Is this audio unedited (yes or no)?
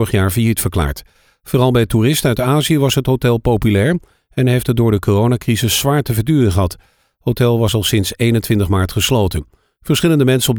yes